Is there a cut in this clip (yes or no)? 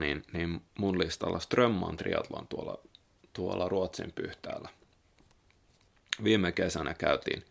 no